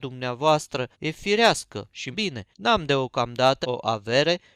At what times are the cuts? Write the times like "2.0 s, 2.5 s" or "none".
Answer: 0.9 s, 2.1 s, 2.5 s, 3.6 s